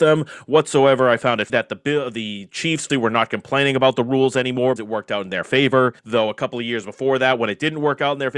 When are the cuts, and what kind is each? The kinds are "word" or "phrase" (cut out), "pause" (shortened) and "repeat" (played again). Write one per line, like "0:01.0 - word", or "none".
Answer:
0:01.5 - word
0:02.9 - word
0:04.8 - word
0:06.0 - pause